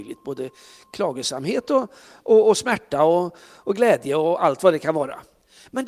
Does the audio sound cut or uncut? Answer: uncut